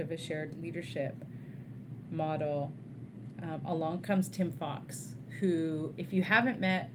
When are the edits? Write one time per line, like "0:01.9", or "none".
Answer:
none

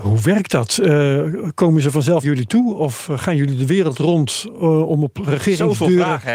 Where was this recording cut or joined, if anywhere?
0:02.2

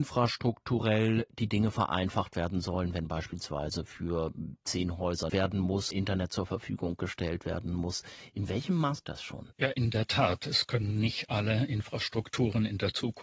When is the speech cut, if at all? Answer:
0:05.3
0:05.9
0:09.0
0:09.5

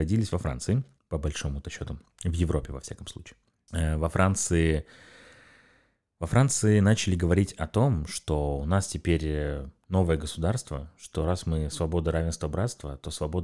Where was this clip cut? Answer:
none

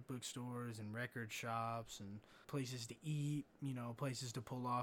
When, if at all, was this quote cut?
0:02.4

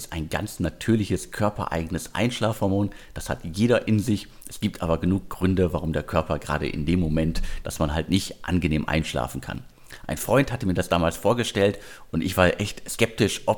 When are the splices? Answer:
0:07.6

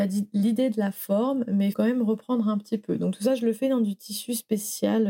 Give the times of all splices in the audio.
0:01.7

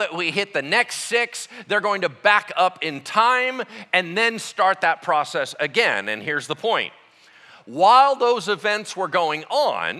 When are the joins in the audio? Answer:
none

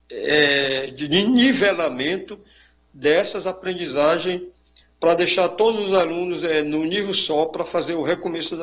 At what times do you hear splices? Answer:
none

